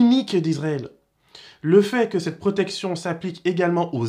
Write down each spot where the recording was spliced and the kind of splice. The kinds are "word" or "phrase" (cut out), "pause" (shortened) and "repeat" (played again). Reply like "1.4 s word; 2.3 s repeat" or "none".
none